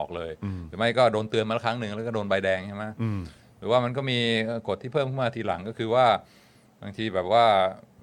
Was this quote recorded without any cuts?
yes; 0 cuts

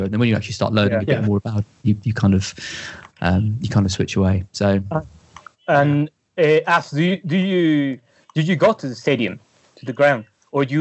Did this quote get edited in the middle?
no; 0 cuts

